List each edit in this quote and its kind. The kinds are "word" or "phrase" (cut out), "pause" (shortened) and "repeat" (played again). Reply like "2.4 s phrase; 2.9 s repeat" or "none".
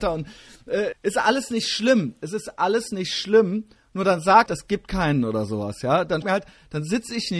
0.9 s word; 4.5 s word; 6.2 s word